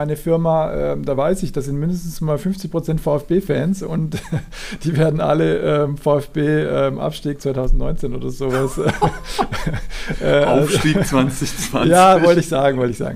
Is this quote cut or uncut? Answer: uncut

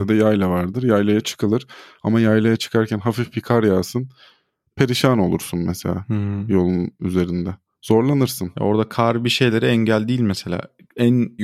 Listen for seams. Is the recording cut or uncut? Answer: uncut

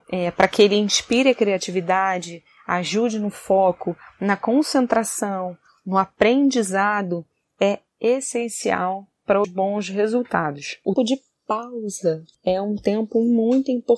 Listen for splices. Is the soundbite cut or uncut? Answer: cut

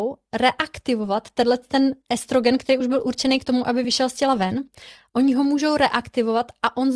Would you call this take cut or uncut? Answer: uncut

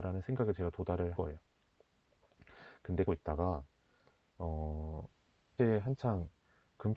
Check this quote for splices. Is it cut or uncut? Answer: cut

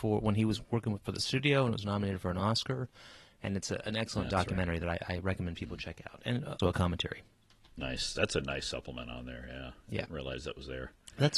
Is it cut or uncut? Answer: cut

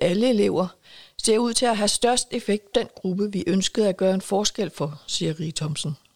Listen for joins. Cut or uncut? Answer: cut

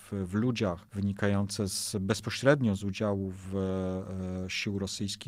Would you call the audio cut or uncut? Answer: uncut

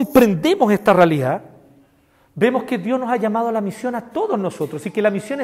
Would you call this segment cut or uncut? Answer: uncut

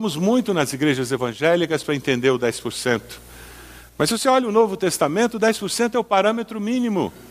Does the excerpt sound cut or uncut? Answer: uncut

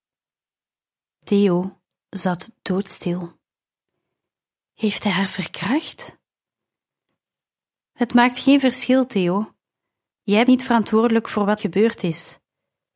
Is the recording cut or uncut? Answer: cut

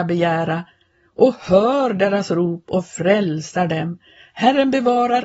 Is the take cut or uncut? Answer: uncut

